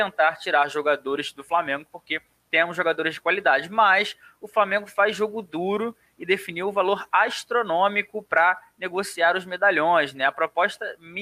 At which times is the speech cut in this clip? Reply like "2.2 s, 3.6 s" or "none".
none